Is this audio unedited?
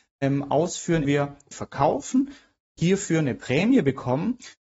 no; 2 cuts; at 1.0 s, 1.5 s

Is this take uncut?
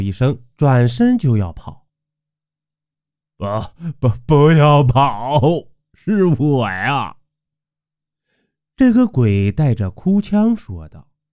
yes; 0 cuts

